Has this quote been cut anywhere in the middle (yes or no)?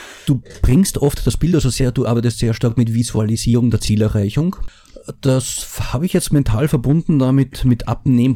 no